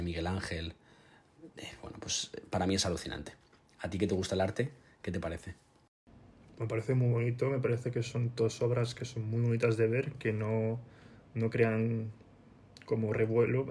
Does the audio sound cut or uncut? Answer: uncut